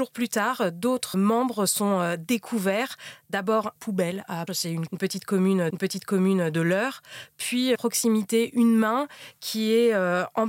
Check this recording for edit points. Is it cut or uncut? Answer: cut